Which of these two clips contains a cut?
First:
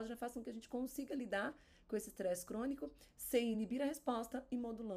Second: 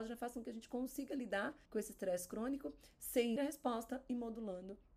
second; 2 cuts; at 1.7 s, 3.4 s

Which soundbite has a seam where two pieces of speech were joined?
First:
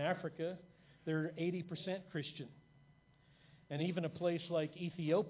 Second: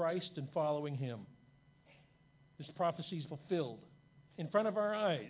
second; 1 cut; at 3.3 s

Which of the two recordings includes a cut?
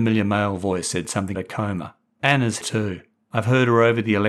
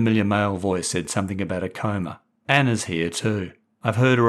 first; 2 cuts; at 1.3 s, 2.6 s

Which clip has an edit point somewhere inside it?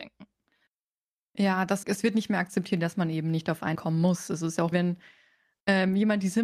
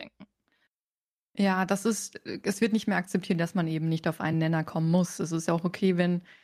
first; 3 cuts; at 1.8 s, 3.7 s, 4.7 s

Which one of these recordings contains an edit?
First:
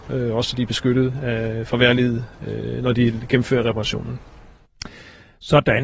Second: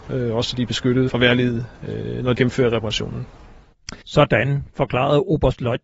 second; 3 cuts; at 1.1 s, 2.3 s, 4.0 s

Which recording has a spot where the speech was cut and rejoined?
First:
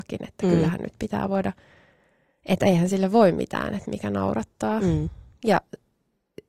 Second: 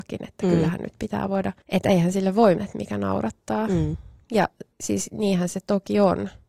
second; 3 cuts; at 1.6 s, 2.6 s, 4.7 s

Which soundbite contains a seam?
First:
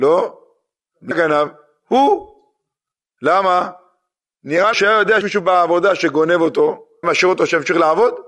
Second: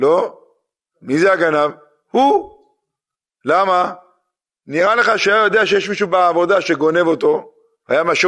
first; 4 cuts; at 1.1 s, 4.7 s, 5.2 s, 7.0 s

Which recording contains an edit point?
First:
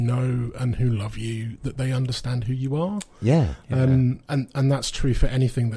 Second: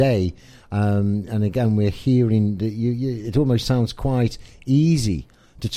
first; 1 cut; at 4.2 s

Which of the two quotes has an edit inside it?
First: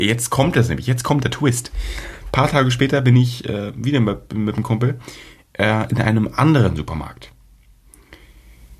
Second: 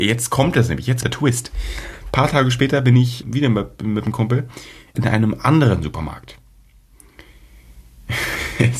second; 3 cuts; at 1.0 s, 3.2 s, 4.9 s

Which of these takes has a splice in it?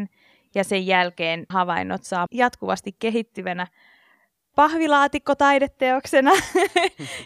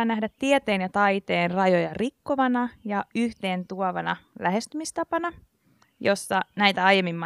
first; 2 cuts; at 1.5 s, 2.3 s

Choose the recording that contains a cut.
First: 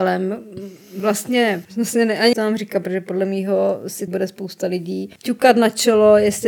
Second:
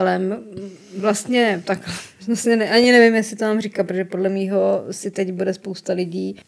first; 3 cuts; at 1.6 s, 2.3 s, 4.1 s

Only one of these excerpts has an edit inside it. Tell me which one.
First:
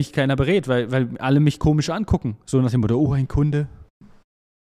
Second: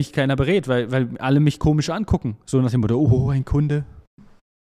first; 1 cut; at 3.1 s

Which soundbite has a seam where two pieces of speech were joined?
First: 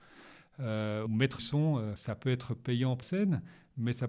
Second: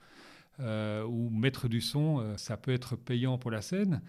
first; 3 cuts; at 1.1 s, 1.4 s, 3.0 s

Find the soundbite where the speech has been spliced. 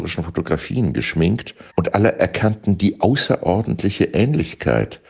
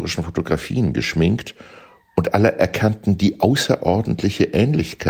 first; 1 cut; at 1.7 s

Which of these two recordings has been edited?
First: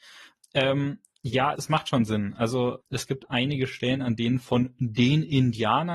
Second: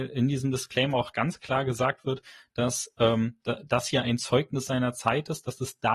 first; 2 cuts; at 1.5 s, 2.8 s

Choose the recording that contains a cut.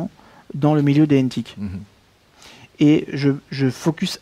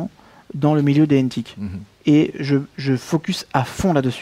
second; 1 cut; at 1.9 s

